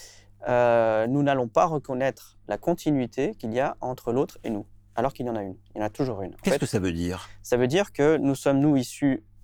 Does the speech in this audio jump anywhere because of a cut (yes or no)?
no